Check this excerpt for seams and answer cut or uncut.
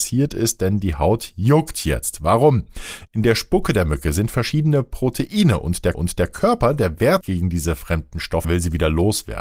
cut